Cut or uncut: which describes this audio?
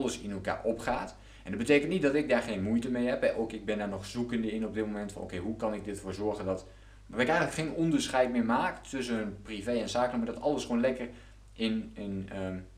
uncut